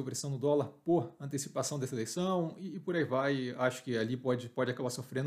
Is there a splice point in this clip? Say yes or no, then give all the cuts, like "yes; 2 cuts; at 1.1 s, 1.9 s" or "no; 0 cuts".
no; 0 cuts